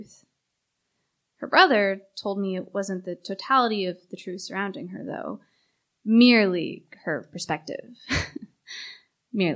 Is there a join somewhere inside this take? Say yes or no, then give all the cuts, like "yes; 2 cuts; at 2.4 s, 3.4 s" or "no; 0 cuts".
no; 0 cuts